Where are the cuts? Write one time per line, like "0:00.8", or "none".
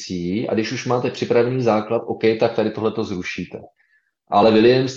none